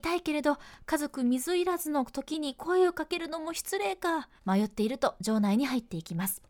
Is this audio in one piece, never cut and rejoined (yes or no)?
no